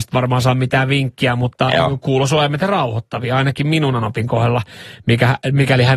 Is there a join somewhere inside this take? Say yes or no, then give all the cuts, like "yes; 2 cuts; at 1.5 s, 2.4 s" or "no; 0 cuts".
no; 0 cuts